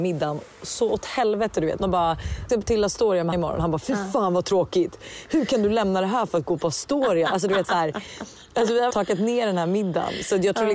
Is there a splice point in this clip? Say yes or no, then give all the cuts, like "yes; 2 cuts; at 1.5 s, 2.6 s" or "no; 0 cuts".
yes; 5 cuts; at 1.8 s, 2.5 s, 3.3 s, 7.6 s, 8.9 s